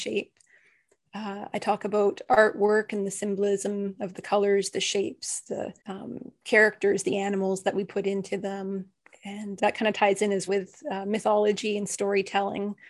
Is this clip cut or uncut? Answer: cut